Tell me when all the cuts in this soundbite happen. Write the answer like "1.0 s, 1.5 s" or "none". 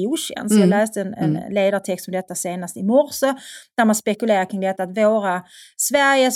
none